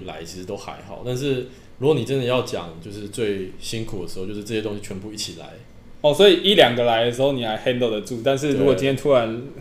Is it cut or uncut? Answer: uncut